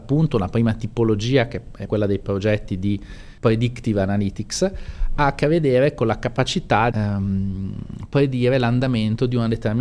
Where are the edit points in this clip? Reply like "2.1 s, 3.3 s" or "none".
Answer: 1.9 s, 3.4 s, 6.9 s